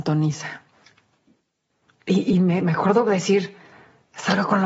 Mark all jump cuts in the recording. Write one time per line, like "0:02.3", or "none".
none